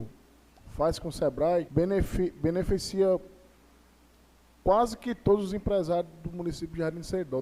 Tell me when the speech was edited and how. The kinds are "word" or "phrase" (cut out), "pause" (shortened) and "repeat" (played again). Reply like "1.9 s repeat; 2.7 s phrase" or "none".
1.7 s word